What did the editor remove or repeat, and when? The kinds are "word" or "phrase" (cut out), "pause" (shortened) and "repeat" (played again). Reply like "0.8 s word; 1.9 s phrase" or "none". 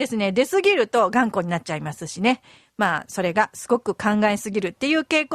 none

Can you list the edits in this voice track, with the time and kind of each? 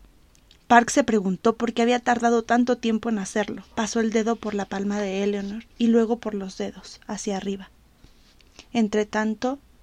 3.7 s pause; 5.7 s pause

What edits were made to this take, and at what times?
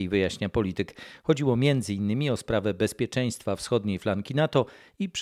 none

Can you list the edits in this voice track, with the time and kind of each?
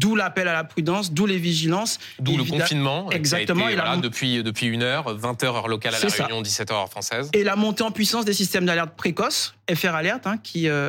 none

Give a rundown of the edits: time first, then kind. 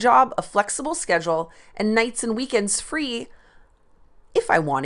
none

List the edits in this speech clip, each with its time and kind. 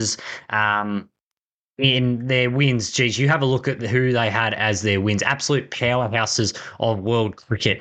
none

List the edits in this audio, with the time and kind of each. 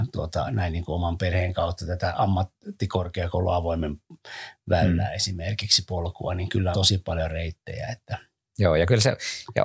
6.7 s word

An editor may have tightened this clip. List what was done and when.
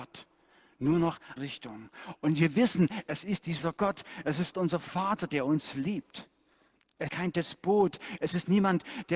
1.4 s word; 4.5 s word; 7.1 s word

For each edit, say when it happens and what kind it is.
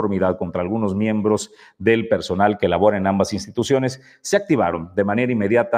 none

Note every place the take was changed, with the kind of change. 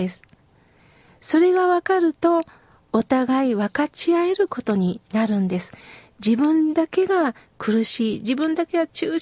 none

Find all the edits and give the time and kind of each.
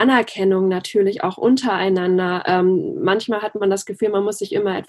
none

